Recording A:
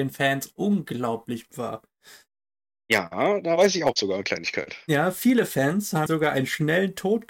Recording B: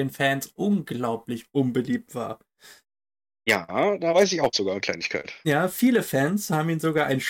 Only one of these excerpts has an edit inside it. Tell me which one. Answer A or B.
A